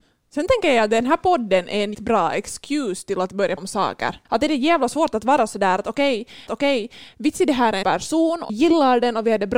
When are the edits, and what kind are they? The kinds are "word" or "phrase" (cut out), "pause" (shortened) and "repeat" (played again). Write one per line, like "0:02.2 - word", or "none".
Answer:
0:01.9 - word
0:03.6 - word
0:04.2 - pause
0:06.5 - repeat
0:07.8 - phrase
0:08.5 - word